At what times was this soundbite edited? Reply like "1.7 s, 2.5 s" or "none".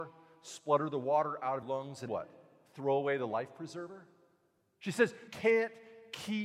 1.6 s, 2.1 s, 5.3 s